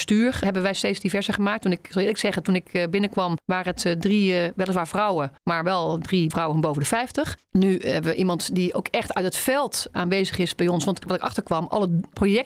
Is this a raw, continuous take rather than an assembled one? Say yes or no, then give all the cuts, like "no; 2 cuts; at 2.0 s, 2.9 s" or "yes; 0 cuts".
no; 2 cuts; at 5.4 s, 6.3 s